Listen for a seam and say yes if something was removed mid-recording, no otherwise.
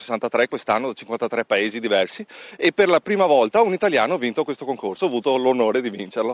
no